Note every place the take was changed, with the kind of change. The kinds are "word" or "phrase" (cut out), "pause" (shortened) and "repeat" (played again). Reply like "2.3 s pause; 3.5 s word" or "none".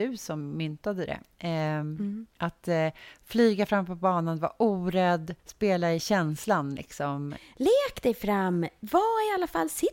2.3 s pause; 5.4 s pause